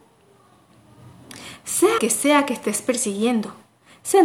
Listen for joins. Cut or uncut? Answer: cut